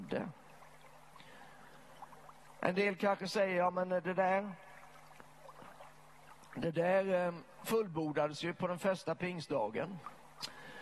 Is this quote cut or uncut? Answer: uncut